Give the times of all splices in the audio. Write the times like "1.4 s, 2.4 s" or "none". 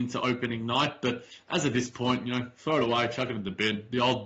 none